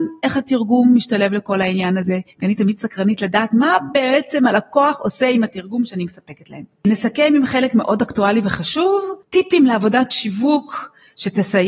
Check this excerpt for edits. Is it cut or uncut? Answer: cut